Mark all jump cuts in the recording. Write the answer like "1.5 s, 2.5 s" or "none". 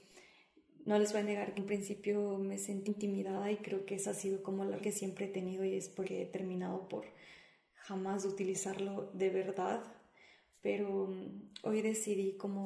1.6 s, 2.9 s, 4.8 s, 6.0 s